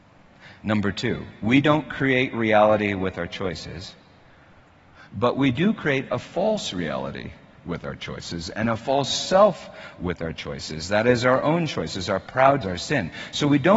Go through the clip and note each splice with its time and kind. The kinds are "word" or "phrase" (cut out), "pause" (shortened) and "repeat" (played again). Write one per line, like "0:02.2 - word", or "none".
0:12.6 - word